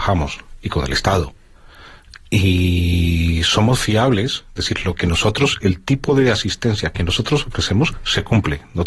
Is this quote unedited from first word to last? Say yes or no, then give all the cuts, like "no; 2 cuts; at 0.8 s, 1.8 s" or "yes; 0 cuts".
yes; 0 cuts